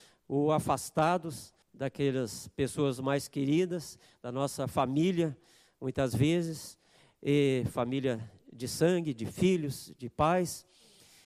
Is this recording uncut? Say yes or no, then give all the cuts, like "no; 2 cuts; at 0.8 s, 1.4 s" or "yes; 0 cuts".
no; 1 cut; at 1.6 s